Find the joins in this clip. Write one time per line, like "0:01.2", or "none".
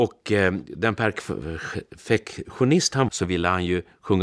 0:03.1